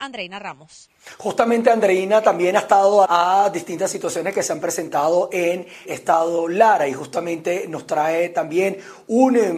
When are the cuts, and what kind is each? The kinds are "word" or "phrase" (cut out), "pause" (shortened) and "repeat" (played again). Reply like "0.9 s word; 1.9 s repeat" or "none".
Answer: 3.0 s word; 5.8 s word